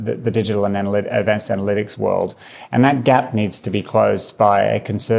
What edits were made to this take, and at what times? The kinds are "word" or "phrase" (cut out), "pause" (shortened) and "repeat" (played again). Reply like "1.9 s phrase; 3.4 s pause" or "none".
none